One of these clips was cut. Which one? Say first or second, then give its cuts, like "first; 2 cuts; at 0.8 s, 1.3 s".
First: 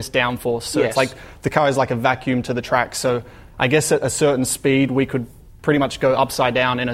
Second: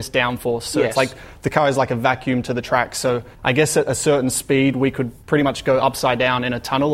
second; 2 cuts; at 3.3 s, 5.2 s